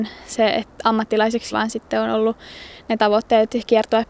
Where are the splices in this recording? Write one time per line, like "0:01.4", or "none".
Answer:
0:01.5